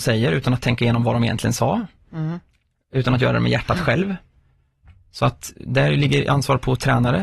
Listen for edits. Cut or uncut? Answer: uncut